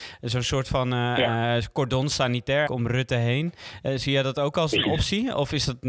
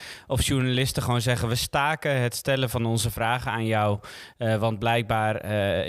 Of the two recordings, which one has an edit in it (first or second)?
first